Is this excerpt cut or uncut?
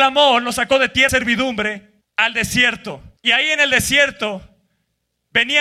cut